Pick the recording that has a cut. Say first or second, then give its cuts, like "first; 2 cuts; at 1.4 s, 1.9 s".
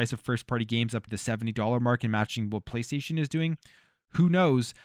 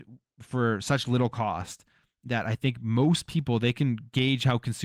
first; 1 cut; at 1.1 s